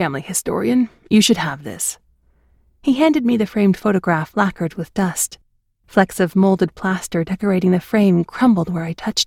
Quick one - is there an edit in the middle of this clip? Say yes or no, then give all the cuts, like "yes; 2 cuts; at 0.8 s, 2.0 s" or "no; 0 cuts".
no; 0 cuts